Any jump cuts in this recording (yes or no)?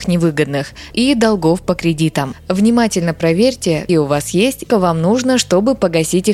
yes